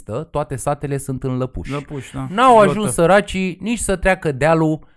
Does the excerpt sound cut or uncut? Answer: uncut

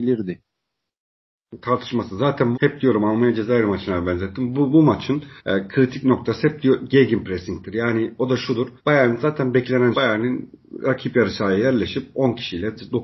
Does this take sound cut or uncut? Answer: cut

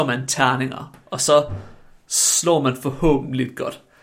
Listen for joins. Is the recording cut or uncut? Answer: uncut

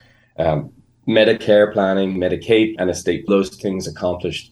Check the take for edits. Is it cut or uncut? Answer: cut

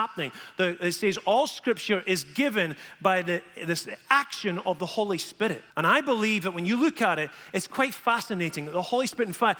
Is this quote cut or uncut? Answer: cut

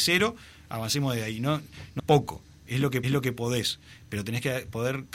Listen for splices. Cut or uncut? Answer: cut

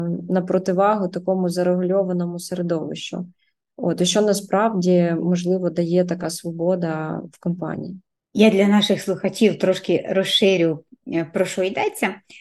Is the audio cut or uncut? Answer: uncut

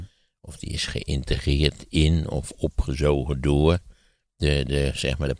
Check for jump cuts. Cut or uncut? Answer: uncut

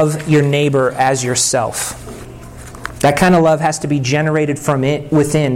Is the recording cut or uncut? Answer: uncut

